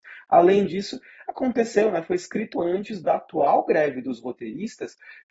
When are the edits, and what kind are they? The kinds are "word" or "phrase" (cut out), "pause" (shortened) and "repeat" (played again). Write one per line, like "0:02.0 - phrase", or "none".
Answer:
0:02.5 - word